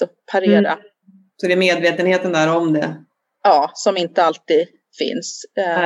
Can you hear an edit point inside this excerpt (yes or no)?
no